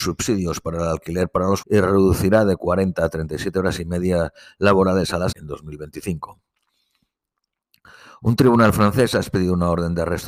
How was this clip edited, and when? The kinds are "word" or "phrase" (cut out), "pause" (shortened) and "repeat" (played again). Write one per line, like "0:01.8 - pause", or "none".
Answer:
0:01.6 - word
0:05.3 - word

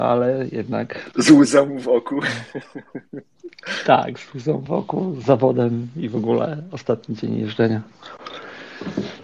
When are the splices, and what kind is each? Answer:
none

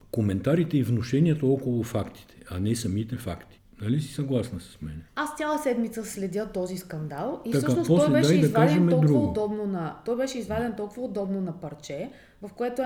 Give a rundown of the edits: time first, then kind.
0:05.1 - pause

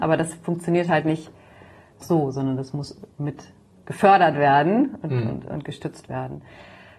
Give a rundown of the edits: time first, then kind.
0:02.0 - word

